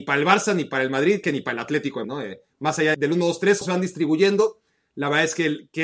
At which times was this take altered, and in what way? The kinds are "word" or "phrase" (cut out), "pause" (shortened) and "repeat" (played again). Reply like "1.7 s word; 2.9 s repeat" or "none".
1.2 s word; 2.0 s word; 2.9 s word; 3.6 s word